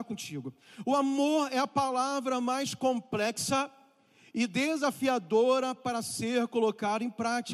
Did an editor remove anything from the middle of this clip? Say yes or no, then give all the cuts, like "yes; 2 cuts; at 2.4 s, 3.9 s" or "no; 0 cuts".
no; 0 cuts